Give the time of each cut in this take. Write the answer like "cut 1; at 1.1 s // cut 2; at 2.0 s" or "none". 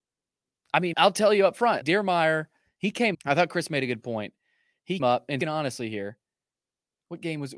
cut 1; at 0.9 s // cut 2; at 1.8 s // cut 3; at 3.1 s // cut 4; at 5.0 s // cut 5; at 5.4 s